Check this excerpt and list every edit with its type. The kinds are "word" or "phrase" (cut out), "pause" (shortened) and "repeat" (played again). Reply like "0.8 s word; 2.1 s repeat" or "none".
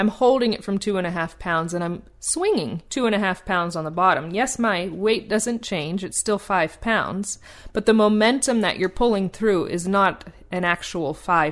2.9 s pause